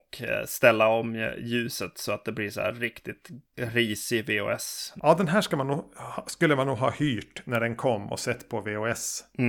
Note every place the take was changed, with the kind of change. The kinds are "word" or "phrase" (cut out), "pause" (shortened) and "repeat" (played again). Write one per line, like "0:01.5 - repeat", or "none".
none